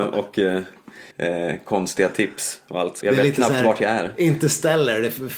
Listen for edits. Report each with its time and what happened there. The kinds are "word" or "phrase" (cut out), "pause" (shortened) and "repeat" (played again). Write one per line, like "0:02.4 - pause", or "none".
0:01.1 - pause
0:03.0 - word